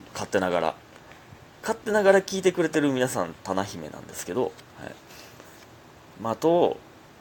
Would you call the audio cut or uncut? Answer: uncut